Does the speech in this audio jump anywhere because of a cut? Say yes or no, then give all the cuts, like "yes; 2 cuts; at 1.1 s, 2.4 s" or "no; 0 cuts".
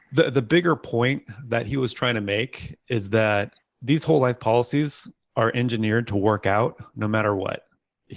no; 0 cuts